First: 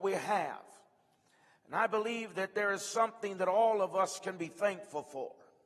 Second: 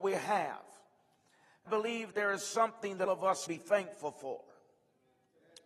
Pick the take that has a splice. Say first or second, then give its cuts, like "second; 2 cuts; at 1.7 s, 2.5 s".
second; 4 cuts; at 1.7 s, 2.1 s, 3.1 s, 3.5 s